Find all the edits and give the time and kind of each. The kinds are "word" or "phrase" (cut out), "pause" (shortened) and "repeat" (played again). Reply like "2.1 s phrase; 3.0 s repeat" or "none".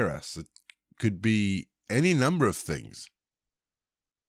none